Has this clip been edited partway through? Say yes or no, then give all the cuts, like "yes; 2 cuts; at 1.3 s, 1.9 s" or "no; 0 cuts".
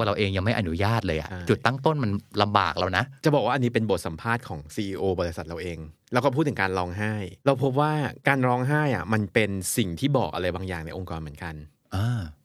yes; 3 cuts; at 3.2 s, 7.4 s, 8.2 s